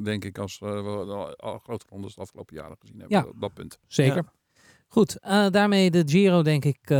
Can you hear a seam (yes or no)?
no